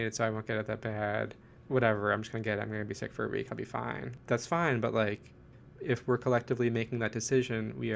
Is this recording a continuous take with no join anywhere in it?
yes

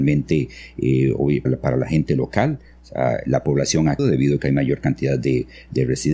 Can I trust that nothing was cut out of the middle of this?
no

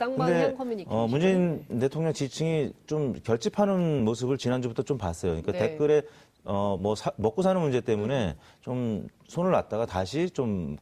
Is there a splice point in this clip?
no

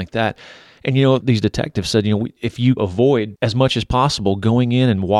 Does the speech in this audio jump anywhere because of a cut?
yes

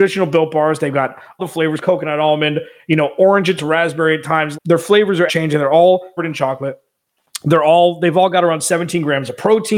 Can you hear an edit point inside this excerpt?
yes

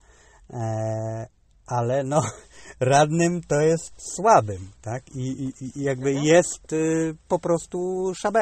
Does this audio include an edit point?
no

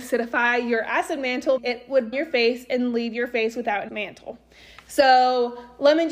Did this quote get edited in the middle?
yes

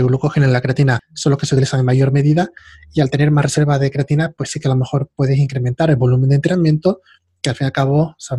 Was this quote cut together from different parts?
no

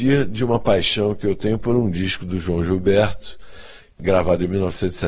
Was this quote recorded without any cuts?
yes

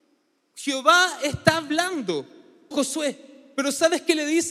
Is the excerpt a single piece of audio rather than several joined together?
no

